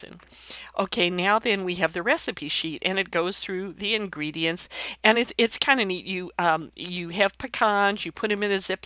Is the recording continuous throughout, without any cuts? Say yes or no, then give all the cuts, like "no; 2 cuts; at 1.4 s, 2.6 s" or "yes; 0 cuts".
yes; 0 cuts